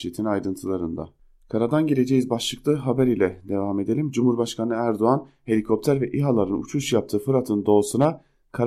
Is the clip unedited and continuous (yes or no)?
yes